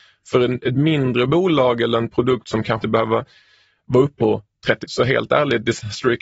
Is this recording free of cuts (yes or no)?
no